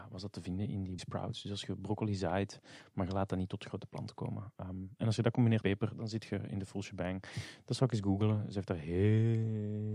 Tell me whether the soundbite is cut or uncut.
cut